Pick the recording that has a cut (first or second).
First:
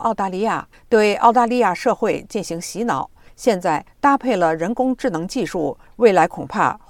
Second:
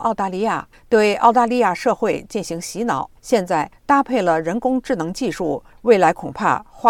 second